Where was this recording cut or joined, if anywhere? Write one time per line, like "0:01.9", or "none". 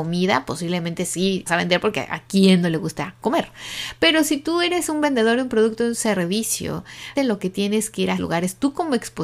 0:01.5
0:07.2
0:08.2